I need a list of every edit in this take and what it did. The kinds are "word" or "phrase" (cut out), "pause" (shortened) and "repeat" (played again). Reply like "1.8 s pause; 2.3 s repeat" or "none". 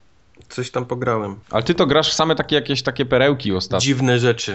1.4 s pause